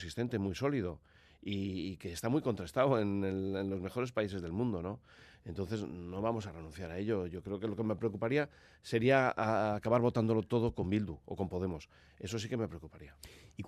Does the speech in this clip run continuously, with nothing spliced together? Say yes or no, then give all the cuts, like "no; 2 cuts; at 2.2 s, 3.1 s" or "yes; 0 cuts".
yes; 0 cuts